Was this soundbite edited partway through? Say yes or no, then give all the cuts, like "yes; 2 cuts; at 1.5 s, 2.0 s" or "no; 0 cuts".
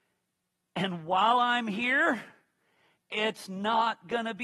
no; 0 cuts